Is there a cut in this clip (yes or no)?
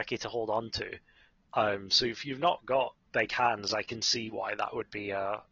no